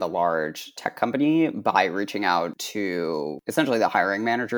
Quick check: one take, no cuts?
yes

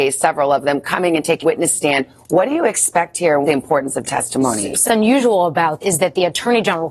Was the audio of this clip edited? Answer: yes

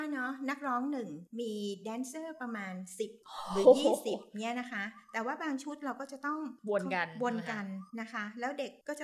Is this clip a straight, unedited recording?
no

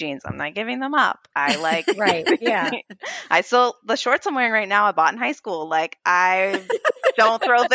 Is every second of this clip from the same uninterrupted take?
yes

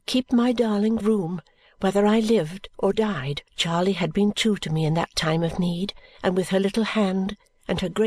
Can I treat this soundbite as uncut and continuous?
no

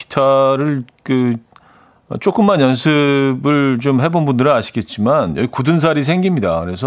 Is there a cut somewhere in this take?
no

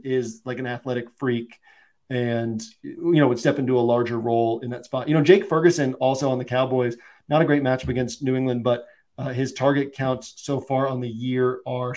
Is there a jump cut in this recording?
no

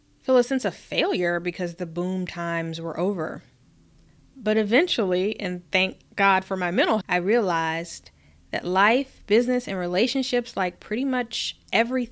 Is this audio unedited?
no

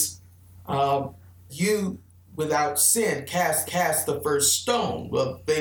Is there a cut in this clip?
yes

